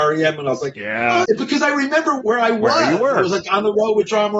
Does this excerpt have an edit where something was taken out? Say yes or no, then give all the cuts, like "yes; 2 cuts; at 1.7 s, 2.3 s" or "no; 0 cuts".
yes; 2 cuts; at 1.2 s, 2.2 s